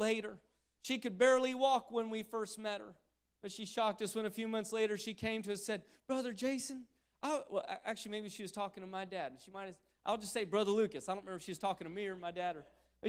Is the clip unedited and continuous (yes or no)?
yes